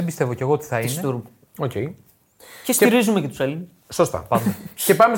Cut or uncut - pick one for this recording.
uncut